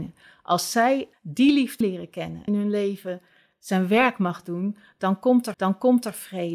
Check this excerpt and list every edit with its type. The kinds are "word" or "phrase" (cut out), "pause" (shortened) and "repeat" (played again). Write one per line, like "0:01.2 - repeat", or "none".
0:01.1 - word
0:01.8 - phrase
0:02.5 - phrase
0:05.5 - repeat